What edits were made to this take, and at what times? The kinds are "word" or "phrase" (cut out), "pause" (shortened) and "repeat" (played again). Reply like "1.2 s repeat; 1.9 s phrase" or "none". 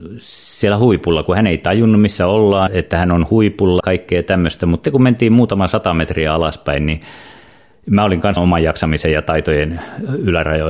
2.7 s word; 3.8 s word; 4.8 s word; 8.4 s word